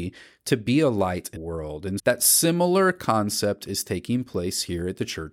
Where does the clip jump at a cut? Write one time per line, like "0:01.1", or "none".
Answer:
0:01.4
0:02.0

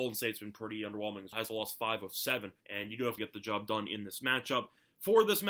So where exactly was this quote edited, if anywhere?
0:01.3
0:02.6
0:03.2

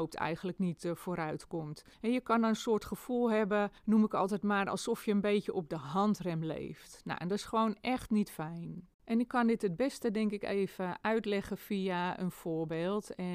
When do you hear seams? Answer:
0:01.9
0:03.8
0:08.9

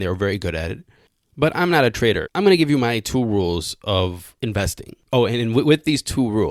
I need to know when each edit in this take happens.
0:02.3

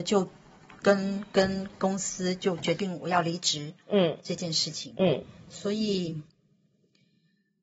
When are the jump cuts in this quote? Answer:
none

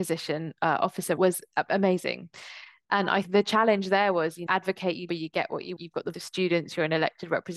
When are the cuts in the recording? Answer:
0:01.2
0:03.2
0:04.5
0:05.1
0:05.8
0:06.1

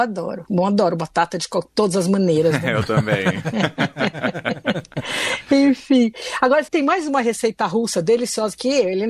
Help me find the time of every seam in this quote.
0:06.7

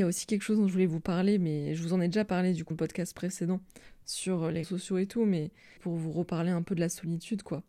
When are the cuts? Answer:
0:02.7
0:04.6
0:05.8

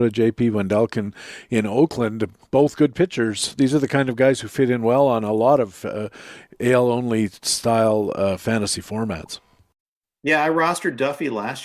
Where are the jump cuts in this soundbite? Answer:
none

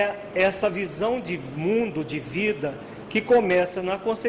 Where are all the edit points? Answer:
none

